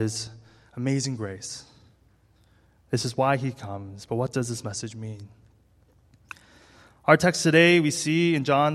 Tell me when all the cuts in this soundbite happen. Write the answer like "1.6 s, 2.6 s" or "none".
none